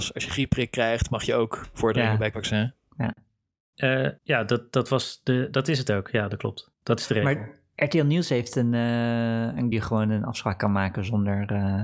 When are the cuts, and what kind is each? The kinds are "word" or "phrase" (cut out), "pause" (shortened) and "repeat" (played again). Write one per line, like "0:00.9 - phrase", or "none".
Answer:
0:04.2 - pause
0:06.7 - pause
0:09.7 - phrase